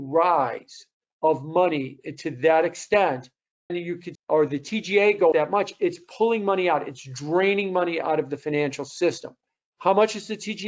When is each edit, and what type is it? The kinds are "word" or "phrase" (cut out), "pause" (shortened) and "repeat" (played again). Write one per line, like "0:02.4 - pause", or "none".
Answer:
0:03.7 - word
0:04.1 - word
0:05.3 - word